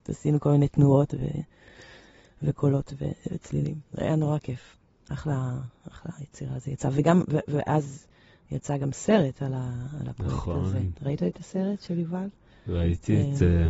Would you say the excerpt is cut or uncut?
uncut